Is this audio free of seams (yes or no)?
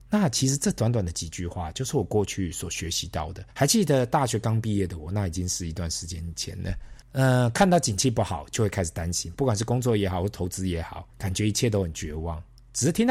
no